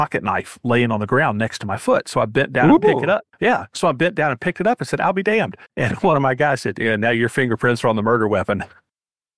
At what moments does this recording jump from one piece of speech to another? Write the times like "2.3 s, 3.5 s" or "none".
3.3 s, 5.6 s